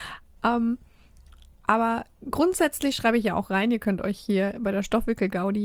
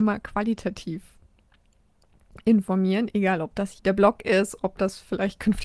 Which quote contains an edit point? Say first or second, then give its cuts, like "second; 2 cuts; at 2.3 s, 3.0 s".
second; 1 cut; at 3.8 s